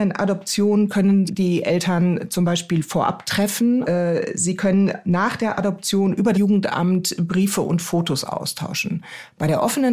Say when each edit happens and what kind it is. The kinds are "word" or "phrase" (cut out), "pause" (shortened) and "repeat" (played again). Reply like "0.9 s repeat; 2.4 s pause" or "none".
1.3 s word; 3.8 s word; 6.3 s word